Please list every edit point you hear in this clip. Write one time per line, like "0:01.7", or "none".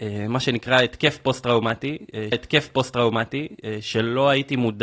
0:02.3